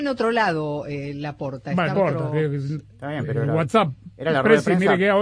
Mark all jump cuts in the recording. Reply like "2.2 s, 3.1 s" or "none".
1.9 s